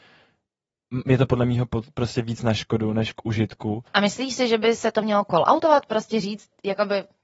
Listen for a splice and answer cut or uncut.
cut